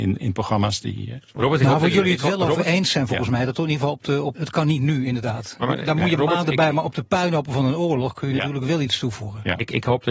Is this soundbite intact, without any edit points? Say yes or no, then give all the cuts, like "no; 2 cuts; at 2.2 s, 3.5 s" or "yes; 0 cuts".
no; 1 cut; at 4.4 s